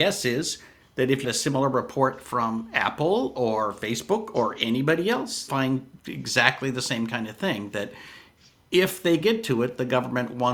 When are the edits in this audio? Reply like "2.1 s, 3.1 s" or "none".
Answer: 1.2 s, 5.5 s, 9.2 s